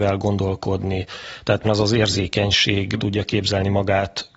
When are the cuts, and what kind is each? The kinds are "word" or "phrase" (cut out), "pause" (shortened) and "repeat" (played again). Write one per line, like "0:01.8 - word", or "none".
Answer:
0:01.6 - word
0:03.0 - phrase